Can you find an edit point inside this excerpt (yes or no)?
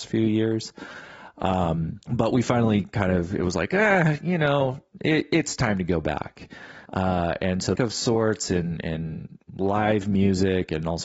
yes